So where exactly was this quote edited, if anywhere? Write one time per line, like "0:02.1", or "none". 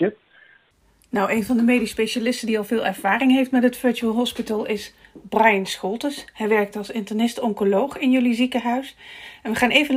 none